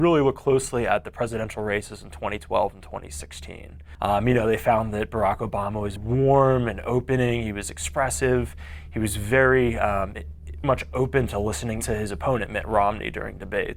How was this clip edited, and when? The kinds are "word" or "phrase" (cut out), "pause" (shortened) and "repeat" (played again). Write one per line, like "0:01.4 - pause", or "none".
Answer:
0:06.0 - word
0:10.6 - word
0:11.8 - word